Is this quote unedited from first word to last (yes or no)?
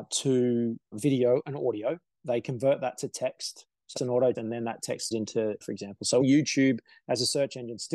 no